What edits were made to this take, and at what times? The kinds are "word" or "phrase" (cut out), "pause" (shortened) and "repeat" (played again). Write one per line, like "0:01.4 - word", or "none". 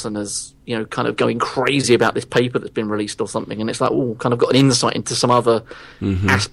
0:04.2 - word